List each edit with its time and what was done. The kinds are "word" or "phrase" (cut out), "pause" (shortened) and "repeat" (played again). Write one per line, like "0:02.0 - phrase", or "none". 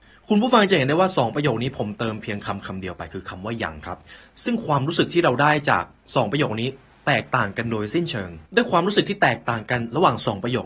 0:08.5 - pause